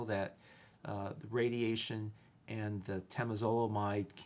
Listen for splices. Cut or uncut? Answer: uncut